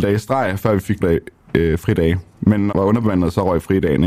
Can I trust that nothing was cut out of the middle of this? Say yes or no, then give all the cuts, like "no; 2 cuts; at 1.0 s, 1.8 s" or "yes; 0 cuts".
no; 2 cuts; at 1.0 s, 2.7 s